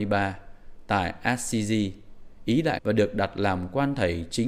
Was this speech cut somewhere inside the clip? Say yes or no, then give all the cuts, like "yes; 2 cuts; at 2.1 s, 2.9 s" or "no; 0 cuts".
yes; 1 cut; at 2.8 s